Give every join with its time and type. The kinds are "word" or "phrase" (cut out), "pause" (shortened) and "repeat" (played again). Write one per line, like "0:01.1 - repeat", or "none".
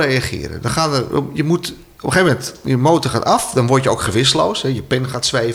none